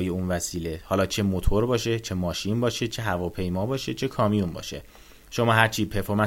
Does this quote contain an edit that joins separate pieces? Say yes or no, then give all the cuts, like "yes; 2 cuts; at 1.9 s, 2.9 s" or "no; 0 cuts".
no; 0 cuts